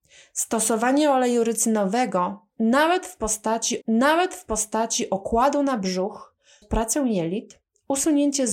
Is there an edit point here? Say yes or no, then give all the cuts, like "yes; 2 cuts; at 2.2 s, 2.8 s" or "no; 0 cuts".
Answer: yes; 2 cuts; at 3.8 s, 6.6 s